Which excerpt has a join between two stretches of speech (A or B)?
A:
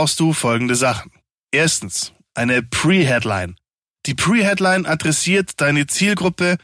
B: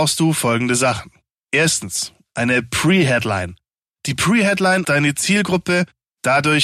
B